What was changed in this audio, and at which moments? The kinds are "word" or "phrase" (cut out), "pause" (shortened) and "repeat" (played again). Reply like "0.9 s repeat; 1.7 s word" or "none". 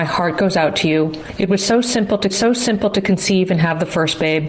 2.3 s repeat